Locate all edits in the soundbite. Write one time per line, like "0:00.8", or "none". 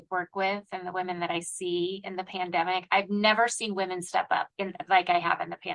0:04.5